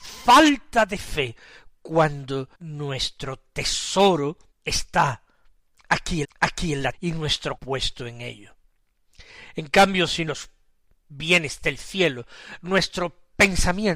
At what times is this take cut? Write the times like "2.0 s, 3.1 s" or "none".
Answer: 2.5 s, 4.5 s, 6.2 s, 6.9 s, 7.6 s, 10.3 s